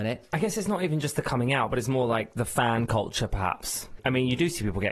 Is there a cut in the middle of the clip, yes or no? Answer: no